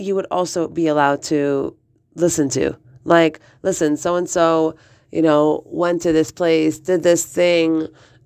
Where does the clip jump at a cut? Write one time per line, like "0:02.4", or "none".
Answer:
none